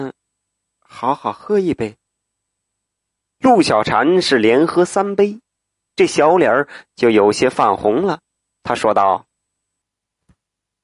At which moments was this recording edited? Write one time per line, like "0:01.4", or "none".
none